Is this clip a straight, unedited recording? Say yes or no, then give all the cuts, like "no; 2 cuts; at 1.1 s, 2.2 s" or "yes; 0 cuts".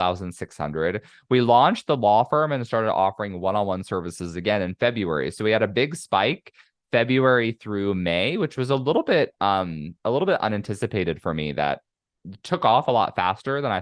yes; 0 cuts